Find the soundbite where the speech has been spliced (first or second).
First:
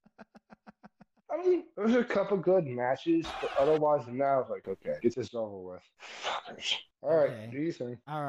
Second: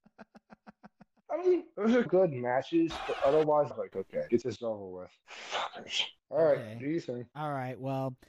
second